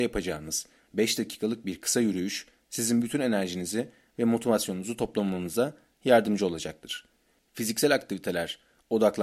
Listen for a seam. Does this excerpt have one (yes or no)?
no